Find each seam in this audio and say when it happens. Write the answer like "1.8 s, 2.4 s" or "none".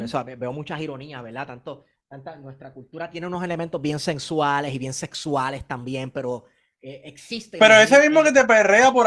none